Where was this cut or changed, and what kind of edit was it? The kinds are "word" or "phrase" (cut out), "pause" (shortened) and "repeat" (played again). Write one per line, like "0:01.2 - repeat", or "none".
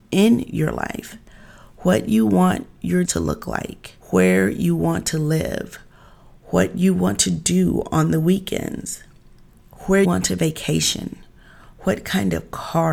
0:03.0 - word
0:04.0 - pause
0:10.0 - word

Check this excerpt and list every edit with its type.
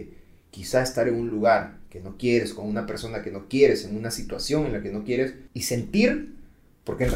none

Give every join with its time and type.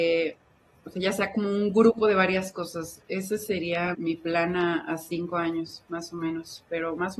0:03.9 - word

